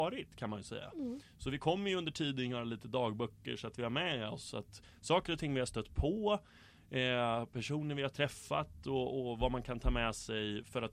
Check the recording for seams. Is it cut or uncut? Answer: uncut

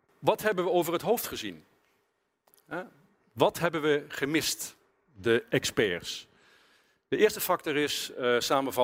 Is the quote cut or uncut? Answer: uncut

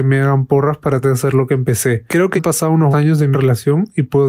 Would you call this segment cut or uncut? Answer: cut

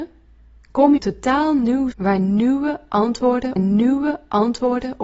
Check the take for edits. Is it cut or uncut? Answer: cut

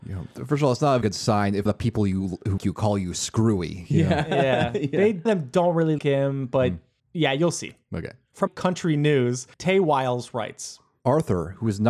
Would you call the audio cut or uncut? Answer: cut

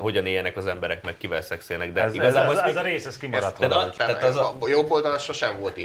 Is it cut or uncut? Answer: cut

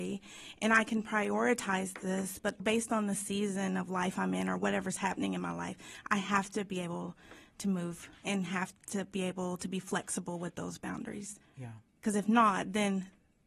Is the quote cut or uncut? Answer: cut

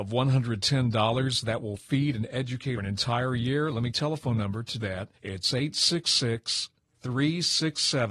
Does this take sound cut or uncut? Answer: cut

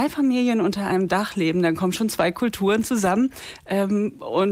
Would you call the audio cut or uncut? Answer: uncut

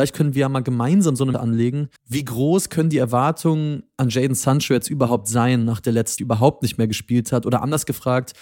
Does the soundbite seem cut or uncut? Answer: cut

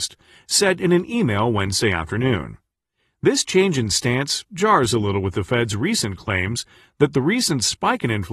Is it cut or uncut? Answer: uncut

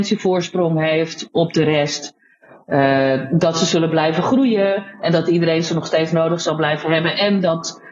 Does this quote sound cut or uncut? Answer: uncut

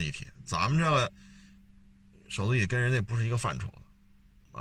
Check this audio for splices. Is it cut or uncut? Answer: uncut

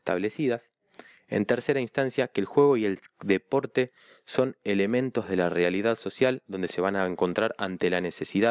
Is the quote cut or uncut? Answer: uncut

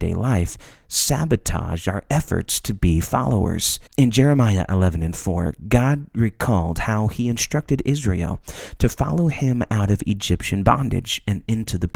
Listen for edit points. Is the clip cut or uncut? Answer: cut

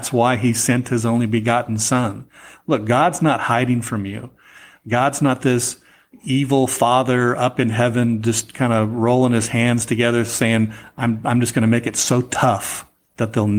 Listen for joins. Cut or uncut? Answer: uncut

